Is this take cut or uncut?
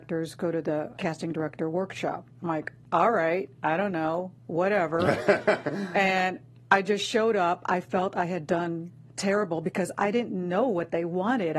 cut